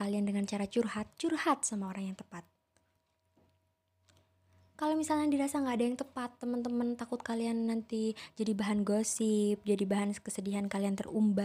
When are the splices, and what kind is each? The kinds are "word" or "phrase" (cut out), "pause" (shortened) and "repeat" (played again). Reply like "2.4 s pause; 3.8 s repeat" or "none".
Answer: none